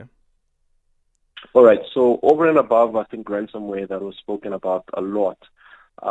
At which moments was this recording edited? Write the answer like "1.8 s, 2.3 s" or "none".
none